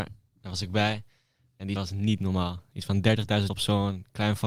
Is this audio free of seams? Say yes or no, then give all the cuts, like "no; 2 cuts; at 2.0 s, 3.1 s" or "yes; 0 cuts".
no; 2 cuts; at 1.8 s, 3.5 s